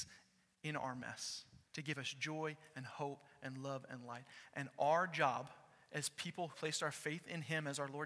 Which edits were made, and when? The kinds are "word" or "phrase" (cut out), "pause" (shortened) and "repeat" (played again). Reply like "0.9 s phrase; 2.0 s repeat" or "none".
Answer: 1.7 s pause; 6.5 s word